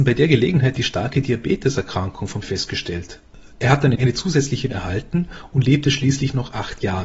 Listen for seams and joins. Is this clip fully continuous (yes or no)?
no